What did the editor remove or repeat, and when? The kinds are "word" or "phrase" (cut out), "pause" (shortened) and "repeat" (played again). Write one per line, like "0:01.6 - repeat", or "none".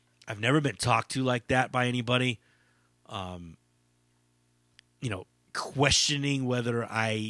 none

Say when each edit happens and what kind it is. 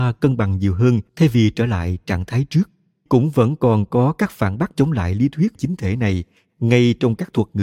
0:01.1 - pause
0:03.1 - word
0:04.7 - phrase
0:05.6 - word

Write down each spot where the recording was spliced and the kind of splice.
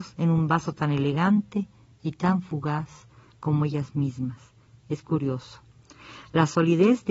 none

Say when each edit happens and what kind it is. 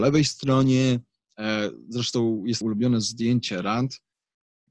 0:02.6 - phrase

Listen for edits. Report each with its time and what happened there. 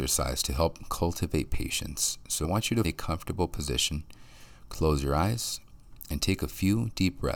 0:02.4 - word
0:02.8 - word

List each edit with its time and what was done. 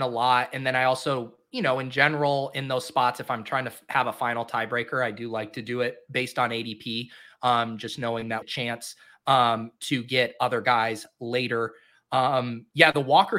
0:08.4 - phrase

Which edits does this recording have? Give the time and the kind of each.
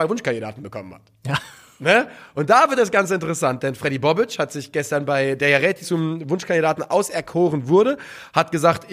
0:05.8 - word

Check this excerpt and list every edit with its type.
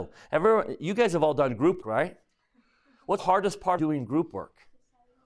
0:01.8 - word
0:03.2 - word
0:03.8 - word

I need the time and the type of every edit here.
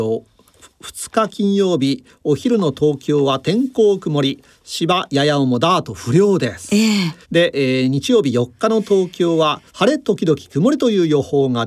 0:07.2 - pause
0:09.7 - pause

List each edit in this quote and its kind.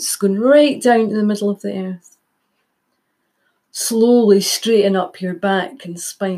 none

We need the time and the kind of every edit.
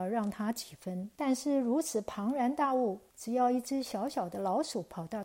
0:01.1 - pause
0:03.1 - pause

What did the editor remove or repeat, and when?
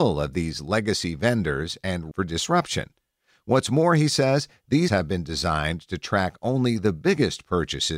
0:02.1 - word
0:04.9 - word

